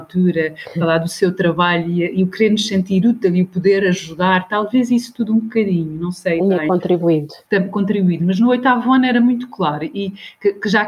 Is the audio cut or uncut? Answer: uncut